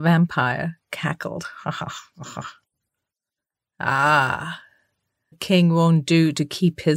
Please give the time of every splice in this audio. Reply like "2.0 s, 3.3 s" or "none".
5.3 s